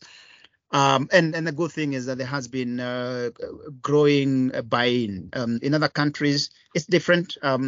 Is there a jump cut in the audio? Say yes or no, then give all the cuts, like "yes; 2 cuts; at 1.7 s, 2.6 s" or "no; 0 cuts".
no; 0 cuts